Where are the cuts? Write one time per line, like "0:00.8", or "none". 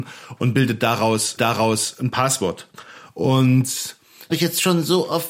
0:01.4
0:04.3